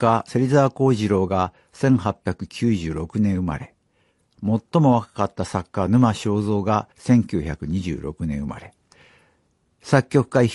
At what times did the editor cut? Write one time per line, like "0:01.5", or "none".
0:06.9